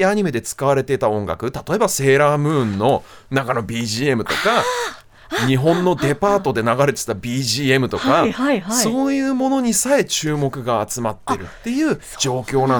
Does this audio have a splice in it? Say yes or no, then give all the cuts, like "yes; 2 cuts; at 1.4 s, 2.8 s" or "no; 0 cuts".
no; 0 cuts